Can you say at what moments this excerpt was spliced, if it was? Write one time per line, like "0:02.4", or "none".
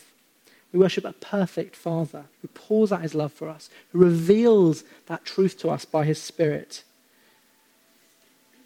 0:02.3